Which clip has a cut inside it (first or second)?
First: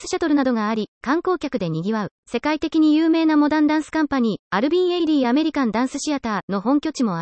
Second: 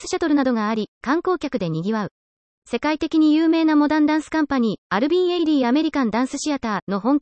first